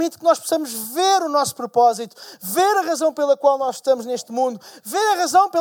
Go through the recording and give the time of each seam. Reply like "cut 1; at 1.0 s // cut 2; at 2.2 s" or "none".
none